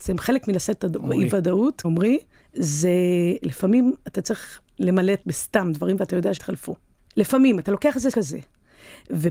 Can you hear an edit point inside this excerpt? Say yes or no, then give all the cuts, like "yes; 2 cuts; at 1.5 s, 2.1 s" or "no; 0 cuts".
yes; 7 cuts; at 1.8 s, 4.0 s, 4.7 s, 5.2 s, 6.4 s, 7.0 s, 8.1 s